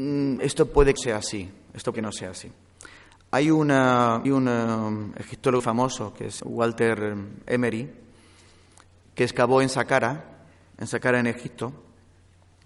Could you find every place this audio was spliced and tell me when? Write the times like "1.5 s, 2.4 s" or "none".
1.0 s, 1.9 s, 4.2 s, 5.6 s, 6.4 s